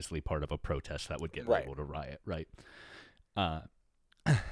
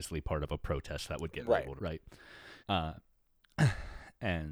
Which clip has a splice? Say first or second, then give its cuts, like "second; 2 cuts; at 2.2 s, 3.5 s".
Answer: second; 2 cuts; at 1.8 s, 2.6 s